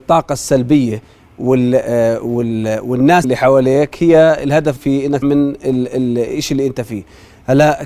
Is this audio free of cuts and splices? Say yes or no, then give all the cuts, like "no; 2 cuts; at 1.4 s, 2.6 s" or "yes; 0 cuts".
no; 3 cuts; at 3.2 s, 4.8 s, 5.2 s